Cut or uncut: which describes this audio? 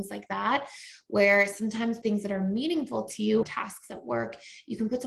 cut